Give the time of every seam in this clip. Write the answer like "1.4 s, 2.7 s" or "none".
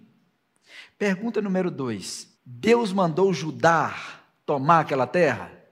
2.3 s